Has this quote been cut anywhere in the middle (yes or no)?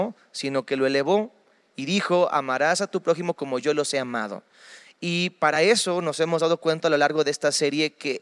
no